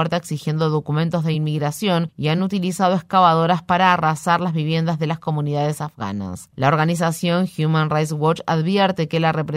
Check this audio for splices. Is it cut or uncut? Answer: uncut